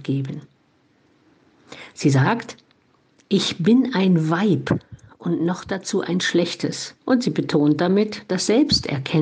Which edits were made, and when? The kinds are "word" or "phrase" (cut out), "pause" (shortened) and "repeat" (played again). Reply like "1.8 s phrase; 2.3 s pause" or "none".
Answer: 7.0 s pause